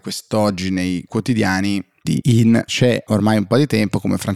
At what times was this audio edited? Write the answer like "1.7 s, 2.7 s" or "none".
1.1 s, 2.2 s, 2.7 s, 3.1 s